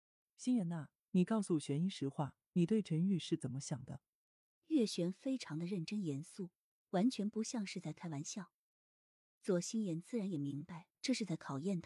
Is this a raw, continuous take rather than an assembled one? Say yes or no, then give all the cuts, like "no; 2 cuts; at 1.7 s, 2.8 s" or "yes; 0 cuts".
yes; 0 cuts